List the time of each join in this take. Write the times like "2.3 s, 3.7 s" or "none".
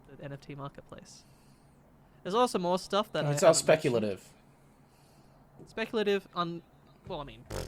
none